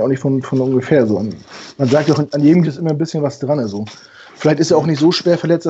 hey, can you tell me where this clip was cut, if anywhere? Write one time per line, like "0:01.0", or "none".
0:02.6